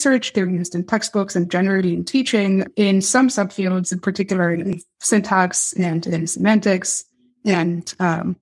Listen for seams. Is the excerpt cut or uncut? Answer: uncut